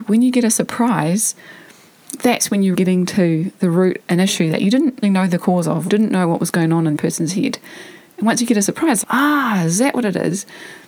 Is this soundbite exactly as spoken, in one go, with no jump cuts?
no; 6 cuts; at 2.7 s, 4.0 s, 5.0 s, 5.9 s, 7.0 s, 9.0 s

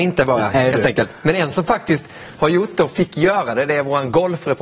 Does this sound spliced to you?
no; 0 cuts

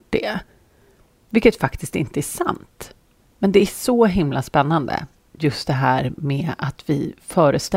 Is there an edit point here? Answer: no; 0 cuts

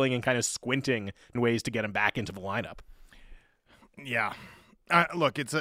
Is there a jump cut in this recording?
yes; 1 cut; at 1.4 s

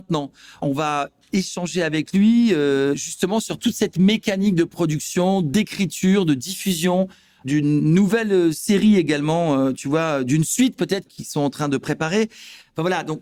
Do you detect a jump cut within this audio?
no; 0 cuts

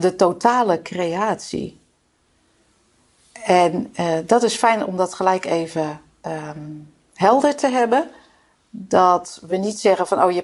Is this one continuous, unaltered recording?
yes; 0 cuts

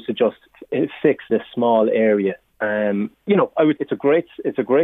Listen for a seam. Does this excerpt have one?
yes; 3 cuts; at 1.3 s, 3.1 s, 3.8 s

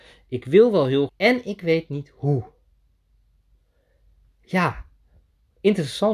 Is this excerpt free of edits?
no; 1 cut; at 1.1 s

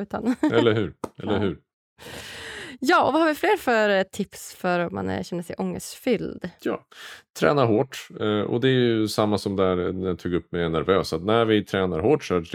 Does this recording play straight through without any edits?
yes; 0 cuts

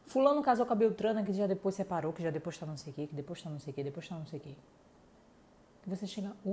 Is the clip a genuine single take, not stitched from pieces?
yes; 0 cuts

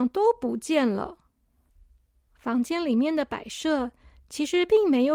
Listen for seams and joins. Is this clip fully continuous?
no; 1 cut; at 1.7 s

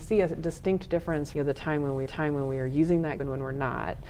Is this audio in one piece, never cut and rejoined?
no; 3 cuts; at 1.3 s, 2.1 s, 3.2 s

